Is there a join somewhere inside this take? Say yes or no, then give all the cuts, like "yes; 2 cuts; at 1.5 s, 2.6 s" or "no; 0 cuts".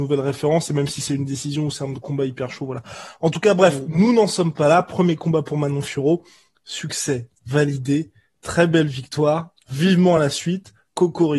no; 0 cuts